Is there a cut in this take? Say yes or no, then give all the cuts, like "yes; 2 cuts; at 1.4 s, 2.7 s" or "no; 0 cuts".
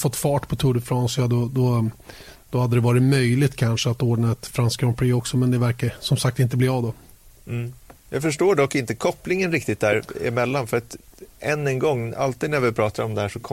no; 0 cuts